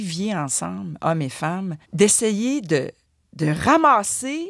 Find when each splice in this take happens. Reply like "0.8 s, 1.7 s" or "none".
1.8 s